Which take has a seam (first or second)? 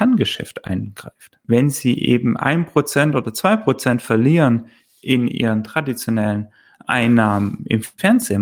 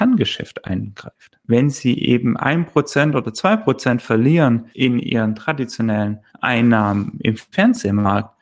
second